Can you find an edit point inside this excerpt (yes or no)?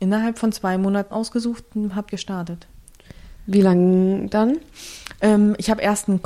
yes